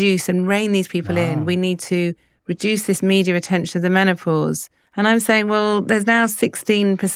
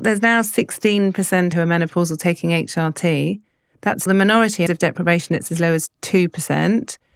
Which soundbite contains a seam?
second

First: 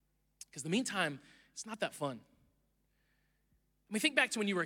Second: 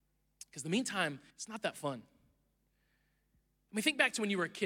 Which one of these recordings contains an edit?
second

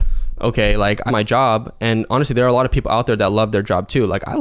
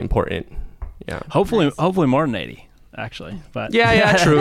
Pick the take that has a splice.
first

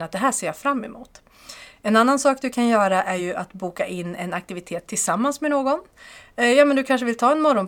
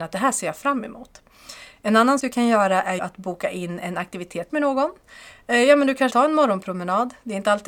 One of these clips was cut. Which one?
second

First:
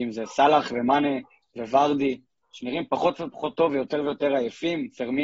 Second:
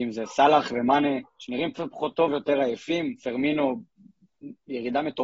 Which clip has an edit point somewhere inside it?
second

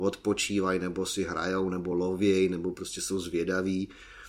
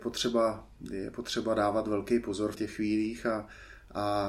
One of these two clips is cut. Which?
second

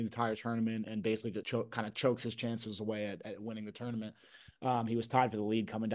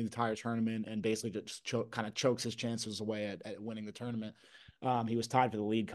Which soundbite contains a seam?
first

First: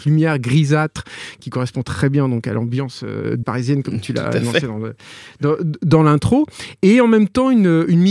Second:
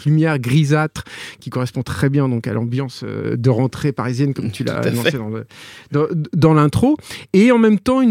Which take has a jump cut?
first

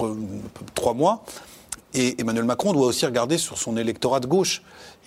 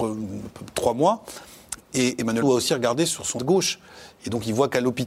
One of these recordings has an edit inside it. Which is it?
second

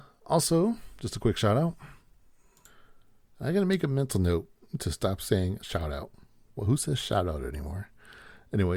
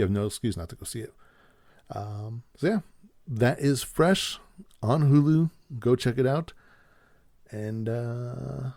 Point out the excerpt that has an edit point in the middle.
first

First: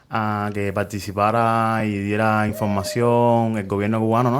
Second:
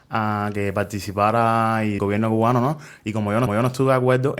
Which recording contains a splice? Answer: second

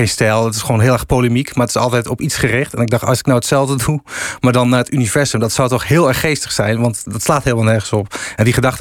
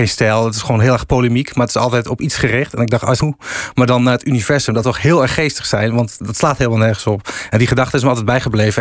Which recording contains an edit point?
second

